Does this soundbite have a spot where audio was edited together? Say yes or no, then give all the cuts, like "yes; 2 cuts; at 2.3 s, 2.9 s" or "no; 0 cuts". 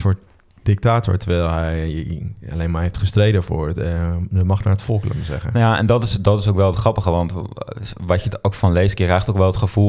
no; 0 cuts